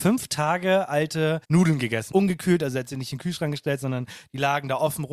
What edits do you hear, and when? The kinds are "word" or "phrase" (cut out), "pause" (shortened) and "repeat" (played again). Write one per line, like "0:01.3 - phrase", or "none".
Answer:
0:01.4 - pause
0:02.1 - word